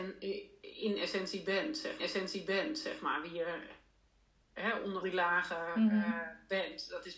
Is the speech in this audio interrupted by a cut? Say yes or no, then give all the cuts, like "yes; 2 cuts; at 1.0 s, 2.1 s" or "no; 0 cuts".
yes; 2 cuts; at 2.0 s, 5.0 s